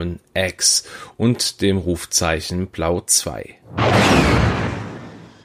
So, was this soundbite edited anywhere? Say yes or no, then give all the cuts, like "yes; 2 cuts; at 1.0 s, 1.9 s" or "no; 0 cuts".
no; 0 cuts